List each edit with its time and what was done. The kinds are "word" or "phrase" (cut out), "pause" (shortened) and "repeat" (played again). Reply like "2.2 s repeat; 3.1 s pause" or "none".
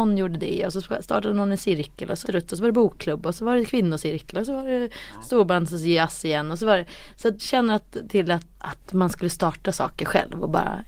2.2 s word; 7.4 s word; 8.1 s phrase; 8.6 s word